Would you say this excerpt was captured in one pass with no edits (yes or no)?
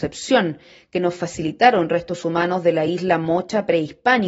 yes